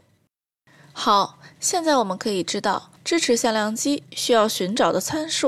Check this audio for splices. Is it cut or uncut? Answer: cut